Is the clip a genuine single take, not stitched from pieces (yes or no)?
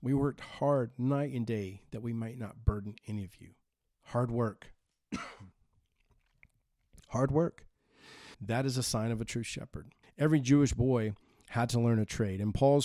no